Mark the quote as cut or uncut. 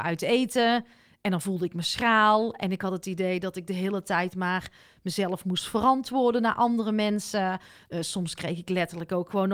uncut